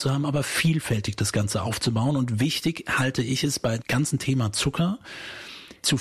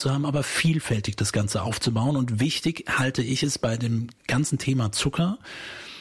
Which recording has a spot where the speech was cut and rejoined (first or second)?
first